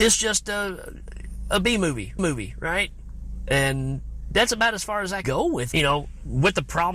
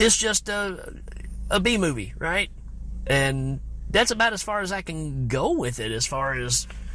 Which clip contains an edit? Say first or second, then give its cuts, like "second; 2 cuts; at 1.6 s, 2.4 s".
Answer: first; 3 cuts; at 2.2 s, 5.2 s, 5.7 s